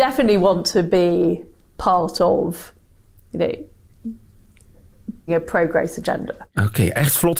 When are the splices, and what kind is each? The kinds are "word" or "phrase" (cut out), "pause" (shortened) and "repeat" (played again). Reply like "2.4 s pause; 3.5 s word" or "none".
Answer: 5.3 s word